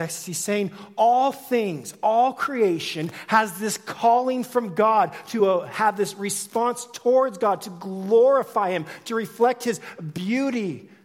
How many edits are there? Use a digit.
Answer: 0